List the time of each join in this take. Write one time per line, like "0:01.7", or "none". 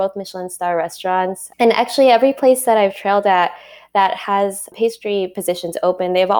none